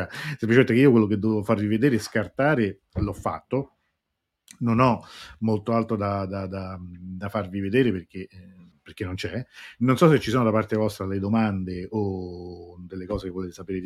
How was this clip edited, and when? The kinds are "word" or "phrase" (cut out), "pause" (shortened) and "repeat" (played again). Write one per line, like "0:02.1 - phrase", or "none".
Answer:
0:08.7 - pause